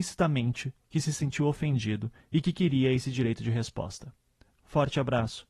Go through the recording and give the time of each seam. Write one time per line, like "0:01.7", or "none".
none

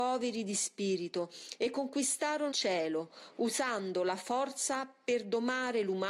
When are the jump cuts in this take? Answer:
0:02.5

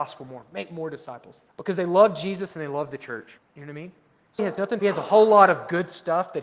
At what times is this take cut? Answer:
0:01.5
0:03.4
0:04.4
0:04.8

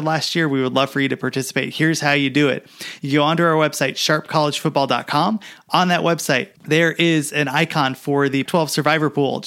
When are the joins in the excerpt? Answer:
0:06.6
0:08.5

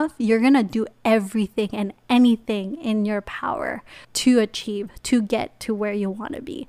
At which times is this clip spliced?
0:04.0

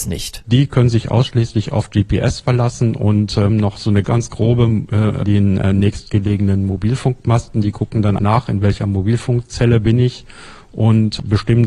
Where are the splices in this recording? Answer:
0:03.5
0:04.0
0:05.2
0:08.2

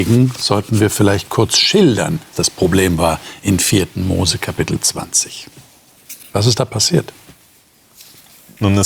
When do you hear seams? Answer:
0:02.3

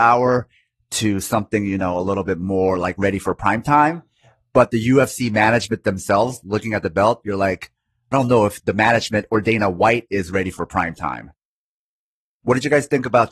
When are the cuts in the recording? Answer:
0:08.1

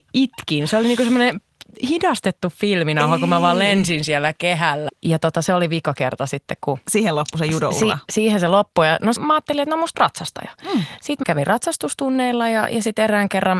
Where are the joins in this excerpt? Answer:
0:04.9
0:09.2
0:09.9
0:11.2

